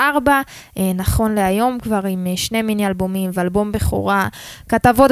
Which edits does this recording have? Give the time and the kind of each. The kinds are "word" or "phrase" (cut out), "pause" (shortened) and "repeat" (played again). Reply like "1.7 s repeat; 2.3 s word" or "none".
none